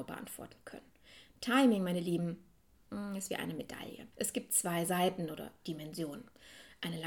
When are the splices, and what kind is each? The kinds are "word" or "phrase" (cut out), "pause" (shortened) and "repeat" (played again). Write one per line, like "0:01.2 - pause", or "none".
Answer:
0:04.1 - pause